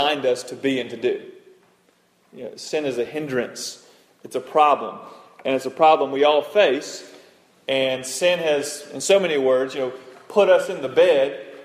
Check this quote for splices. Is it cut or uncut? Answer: uncut